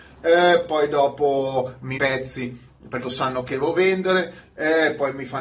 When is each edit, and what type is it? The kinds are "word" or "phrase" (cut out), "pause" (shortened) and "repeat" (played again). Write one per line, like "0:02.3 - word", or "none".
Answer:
0:01.9 - phrase
0:03.0 - word
0:03.5 - word